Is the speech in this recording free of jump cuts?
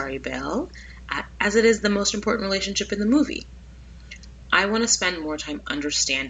yes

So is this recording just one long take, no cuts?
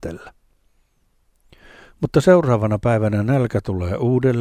yes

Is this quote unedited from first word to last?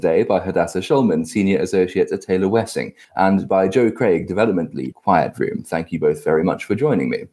no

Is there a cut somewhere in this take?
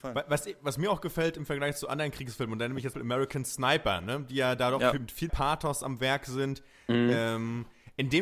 yes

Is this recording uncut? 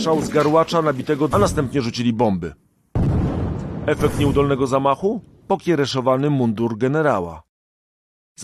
no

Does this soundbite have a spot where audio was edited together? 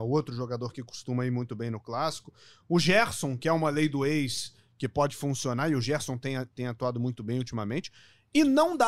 no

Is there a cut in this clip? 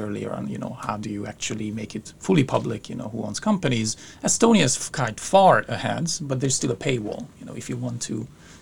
no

